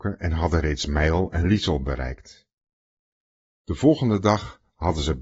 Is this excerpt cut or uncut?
uncut